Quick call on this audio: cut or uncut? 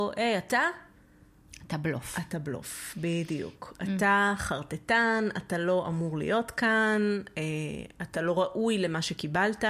uncut